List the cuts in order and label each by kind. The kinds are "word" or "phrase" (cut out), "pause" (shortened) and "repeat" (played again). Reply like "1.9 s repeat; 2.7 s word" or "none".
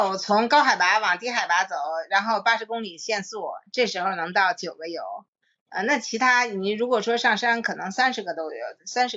none

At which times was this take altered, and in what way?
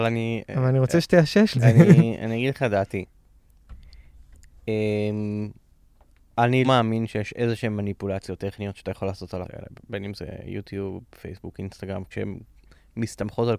1.5 s word; 6.6 s word; 9.4 s word; 12.1 s word

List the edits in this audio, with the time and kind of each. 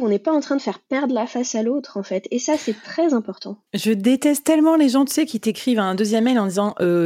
3.7 s pause

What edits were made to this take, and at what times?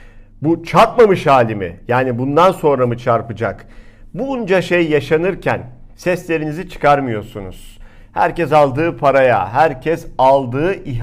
5.9 s pause

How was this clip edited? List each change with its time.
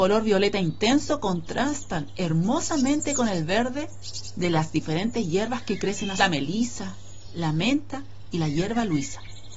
6.2 s phrase

